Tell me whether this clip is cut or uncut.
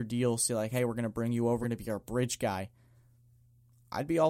cut